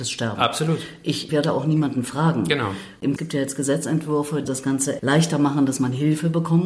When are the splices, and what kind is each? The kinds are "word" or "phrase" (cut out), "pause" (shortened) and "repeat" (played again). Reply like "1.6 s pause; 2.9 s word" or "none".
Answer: 1.3 s phrase; 3.2 s phrase; 4.4 s phrase; 5.0 s word